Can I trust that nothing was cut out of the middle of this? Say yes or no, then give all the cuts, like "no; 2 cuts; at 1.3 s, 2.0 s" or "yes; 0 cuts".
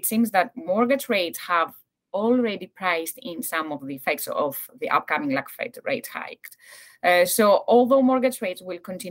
yes; 0 cuts